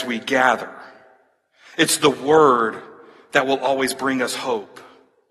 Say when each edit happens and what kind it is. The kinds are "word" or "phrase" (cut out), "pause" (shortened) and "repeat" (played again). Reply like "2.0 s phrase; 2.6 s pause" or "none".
none